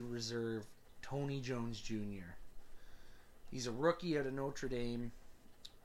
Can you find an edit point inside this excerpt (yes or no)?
no